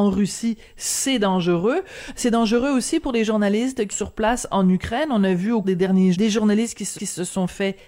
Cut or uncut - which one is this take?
cut